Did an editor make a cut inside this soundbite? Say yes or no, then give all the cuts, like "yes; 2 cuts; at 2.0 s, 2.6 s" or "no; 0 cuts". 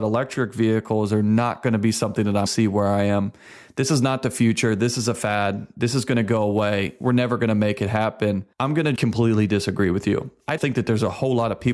yes; 4 cuts; at 2.5 s, 8.5 s, 9.0 s, 10.6 s